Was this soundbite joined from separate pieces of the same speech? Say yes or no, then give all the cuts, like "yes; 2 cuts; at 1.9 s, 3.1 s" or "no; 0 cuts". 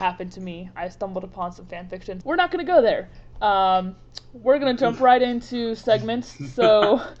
yes; 1 cut; at 2.2 s